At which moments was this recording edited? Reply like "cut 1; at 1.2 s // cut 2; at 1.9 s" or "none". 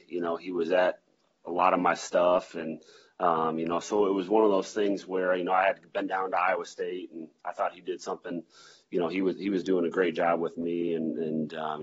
none